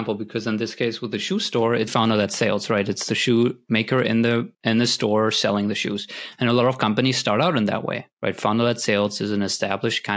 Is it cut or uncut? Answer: cut